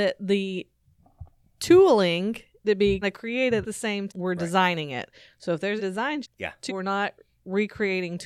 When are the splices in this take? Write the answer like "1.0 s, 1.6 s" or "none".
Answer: 2.6 s, 3.0 s, 3.6 s, 4.1 s, 5.8 s, 6.2 s, 6.7 s